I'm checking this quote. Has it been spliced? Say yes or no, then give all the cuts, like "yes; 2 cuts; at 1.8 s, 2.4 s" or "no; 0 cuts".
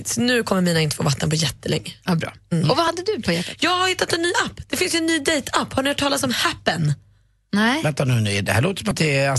no; 0 cuts